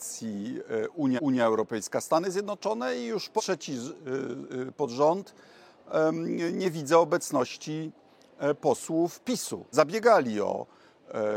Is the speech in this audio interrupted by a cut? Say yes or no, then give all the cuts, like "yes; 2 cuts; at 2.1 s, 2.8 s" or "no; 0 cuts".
yes; 3 cuts; at 1.2 s, 3.4 s, 9.7 s